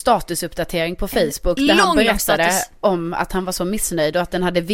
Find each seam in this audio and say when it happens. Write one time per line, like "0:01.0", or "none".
none